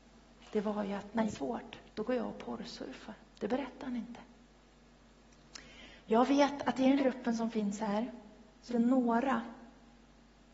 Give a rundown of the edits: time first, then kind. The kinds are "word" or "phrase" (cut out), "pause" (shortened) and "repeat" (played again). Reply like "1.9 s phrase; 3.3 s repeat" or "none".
1.3 s phrase; 1.9 s pause; 3.3 s pause; 7.0 s word; 8.7 s word